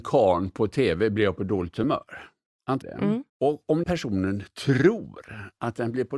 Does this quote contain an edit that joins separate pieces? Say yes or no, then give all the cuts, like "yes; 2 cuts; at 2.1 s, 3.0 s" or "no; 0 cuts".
yes; 3 cuts; at 2.8 s, 3.3 s, 3.8 s